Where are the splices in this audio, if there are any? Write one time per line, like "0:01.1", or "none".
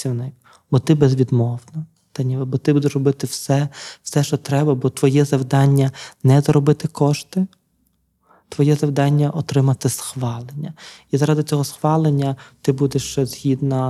none